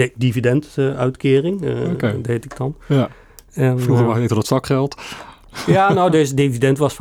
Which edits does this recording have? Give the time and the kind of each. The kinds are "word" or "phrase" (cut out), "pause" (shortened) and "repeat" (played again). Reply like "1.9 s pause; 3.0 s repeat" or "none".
none